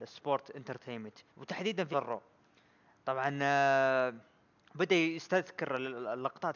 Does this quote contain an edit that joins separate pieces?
yes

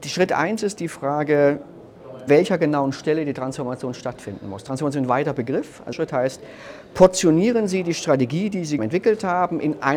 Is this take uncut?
no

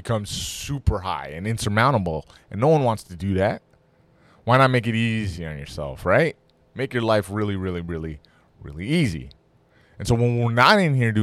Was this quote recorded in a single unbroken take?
yes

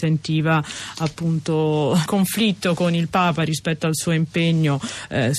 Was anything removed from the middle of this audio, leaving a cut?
yes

